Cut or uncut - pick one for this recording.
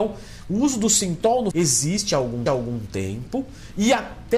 cut